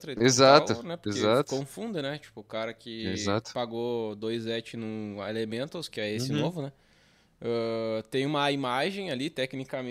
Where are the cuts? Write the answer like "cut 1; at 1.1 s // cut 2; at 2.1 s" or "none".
none